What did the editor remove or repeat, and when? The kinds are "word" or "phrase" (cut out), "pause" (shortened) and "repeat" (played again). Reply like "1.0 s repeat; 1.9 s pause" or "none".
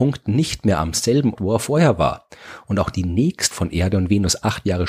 1.3 s word; 3.5 s word